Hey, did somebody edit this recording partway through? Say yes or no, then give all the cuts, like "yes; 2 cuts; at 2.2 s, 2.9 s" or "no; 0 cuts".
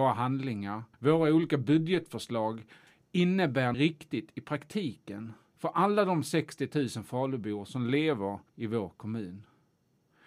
yes; 3 cuts; at 0.9 s, 3.7 s, 8.5 s